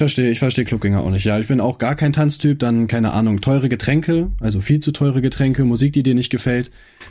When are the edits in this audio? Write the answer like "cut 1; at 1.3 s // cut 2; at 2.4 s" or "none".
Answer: none